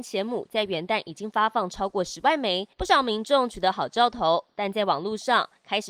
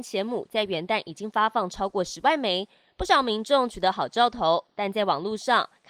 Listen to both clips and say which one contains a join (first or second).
first